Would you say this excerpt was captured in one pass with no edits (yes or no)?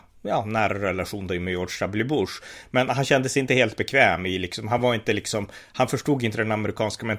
yes